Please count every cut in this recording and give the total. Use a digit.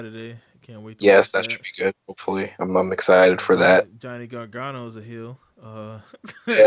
0